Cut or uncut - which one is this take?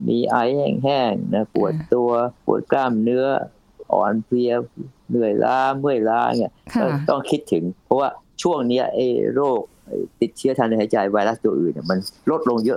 cut